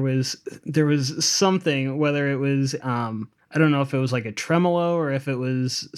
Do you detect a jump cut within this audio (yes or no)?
yes